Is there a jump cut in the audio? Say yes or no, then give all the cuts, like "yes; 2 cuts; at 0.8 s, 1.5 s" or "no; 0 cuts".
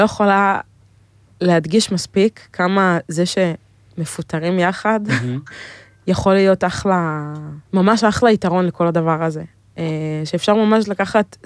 yes; 1 cut; at 7.6 s